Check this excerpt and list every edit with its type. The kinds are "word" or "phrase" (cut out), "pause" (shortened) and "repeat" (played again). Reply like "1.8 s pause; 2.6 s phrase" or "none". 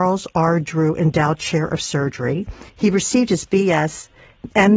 2.7 s pause